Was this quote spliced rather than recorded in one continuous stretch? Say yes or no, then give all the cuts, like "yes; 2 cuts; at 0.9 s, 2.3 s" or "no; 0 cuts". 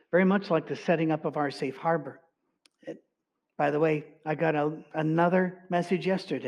yes; 1 cut; at 2.6 s